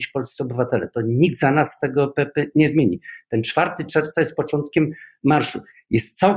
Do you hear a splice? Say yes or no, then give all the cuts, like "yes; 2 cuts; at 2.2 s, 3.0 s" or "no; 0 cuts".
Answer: no; 0 cuts